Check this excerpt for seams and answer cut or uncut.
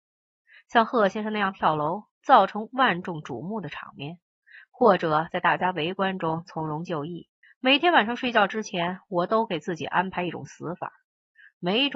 cut